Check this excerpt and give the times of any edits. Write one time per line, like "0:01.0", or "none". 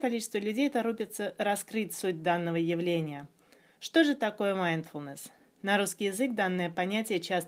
none